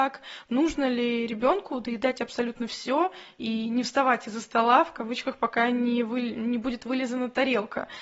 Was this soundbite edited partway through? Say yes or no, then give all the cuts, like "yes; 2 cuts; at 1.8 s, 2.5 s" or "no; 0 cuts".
no; 0 cuts